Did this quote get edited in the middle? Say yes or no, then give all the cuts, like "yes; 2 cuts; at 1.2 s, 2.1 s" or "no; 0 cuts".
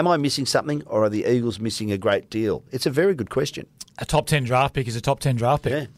no; 0 cuts